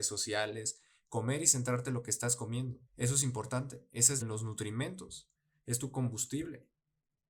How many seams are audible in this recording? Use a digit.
2